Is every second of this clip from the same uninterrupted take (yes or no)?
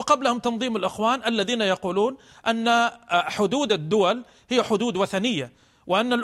yes